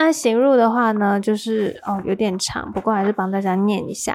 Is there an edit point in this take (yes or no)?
no